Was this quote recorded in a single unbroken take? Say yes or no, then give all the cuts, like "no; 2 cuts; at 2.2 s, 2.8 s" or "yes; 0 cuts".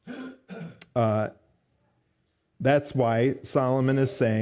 yes; 0 cuts